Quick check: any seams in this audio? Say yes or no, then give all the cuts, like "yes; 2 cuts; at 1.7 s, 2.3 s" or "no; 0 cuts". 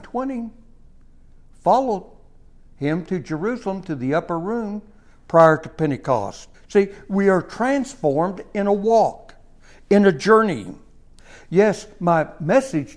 yes; 1 cut; at 6.5 s